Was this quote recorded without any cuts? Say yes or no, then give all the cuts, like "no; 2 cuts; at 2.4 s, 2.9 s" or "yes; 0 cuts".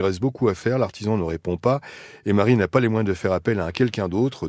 yes; 0 cuts